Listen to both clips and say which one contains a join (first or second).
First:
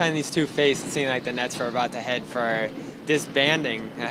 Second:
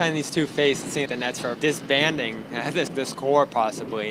second